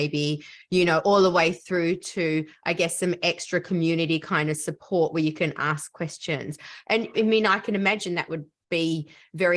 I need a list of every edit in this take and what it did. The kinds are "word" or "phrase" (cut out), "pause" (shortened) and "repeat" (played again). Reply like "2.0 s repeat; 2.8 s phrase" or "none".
7.1 s word